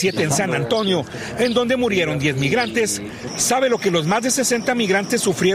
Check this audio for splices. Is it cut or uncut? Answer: uncut